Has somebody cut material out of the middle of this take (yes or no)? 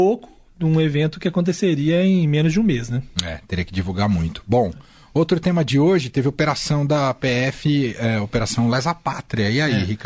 no